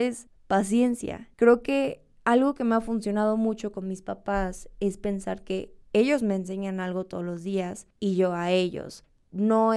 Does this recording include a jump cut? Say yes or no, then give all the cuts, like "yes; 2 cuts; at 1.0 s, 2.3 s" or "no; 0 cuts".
yes; 2 cuts; at 1.3 s, 5.8 s